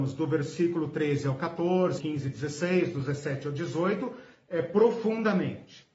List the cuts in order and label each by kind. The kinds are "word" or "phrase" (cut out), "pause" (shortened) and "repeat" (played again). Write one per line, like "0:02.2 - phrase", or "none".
0:02.0 - word